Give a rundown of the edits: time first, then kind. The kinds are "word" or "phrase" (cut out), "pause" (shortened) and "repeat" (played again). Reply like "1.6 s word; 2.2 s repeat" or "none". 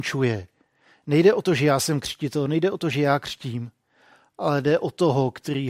none